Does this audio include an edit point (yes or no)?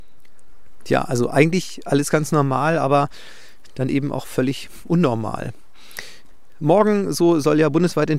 no